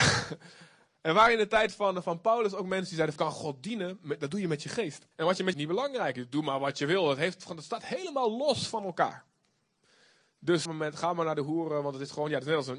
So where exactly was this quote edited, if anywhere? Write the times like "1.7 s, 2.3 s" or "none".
3.2 s, 5.1 s, 5.5 s, 10.7 s